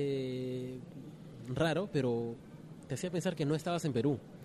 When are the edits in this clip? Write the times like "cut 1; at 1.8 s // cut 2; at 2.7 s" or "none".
none